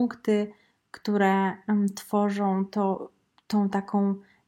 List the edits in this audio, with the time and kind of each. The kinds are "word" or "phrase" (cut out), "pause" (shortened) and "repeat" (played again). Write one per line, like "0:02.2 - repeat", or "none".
none